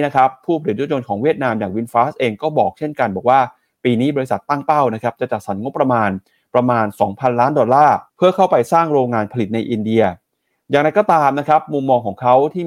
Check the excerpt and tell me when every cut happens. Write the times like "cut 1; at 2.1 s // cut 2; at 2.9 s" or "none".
cut 1; at 8.1 s